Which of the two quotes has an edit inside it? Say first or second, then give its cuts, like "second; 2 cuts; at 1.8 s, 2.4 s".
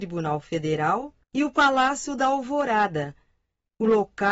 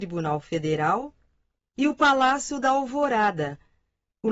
first; 1 cut; at 1.2 s